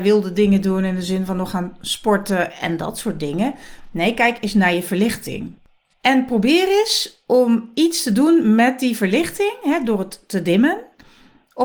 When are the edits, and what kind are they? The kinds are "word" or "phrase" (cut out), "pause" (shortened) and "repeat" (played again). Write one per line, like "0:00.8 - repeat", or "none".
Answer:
none